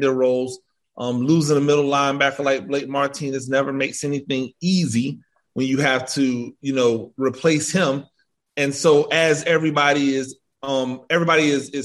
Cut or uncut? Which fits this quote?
uncut